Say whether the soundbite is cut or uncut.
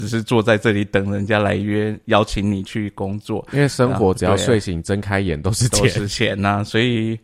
uncut